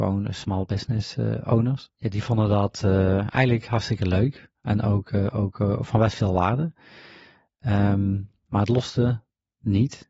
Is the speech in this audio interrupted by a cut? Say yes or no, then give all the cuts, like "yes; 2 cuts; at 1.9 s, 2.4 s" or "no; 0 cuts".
no; 0 cuts